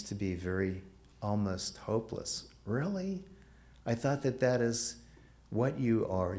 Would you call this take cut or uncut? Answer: uncut